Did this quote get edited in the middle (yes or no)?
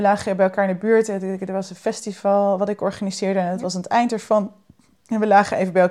no